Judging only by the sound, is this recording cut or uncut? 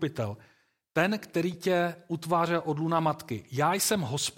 uncut